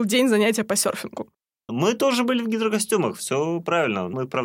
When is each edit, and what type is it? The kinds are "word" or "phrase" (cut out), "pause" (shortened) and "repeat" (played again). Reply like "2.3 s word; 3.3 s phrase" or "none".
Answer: none